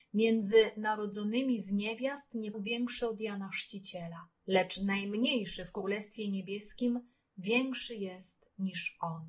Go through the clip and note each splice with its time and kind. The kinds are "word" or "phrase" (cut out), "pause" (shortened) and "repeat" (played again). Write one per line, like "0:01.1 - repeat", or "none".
0:02.5 - word
0:04.4 - pause